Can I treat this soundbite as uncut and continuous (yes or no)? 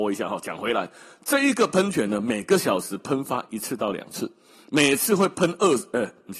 yes